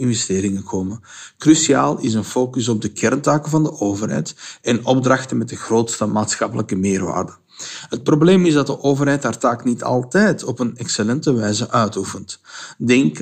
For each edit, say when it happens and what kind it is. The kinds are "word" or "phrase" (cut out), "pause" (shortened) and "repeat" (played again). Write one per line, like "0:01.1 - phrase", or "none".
none